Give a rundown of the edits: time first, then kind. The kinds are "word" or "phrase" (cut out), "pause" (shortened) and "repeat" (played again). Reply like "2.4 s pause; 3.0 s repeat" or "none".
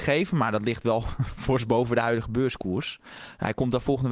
none